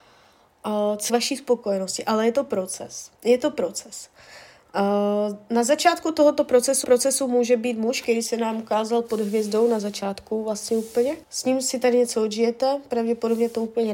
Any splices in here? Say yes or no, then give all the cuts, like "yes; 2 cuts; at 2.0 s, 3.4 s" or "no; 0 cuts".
yes; 4 cuts; at 1.1 s, 3.2 s, 6.8 s, 11.2 s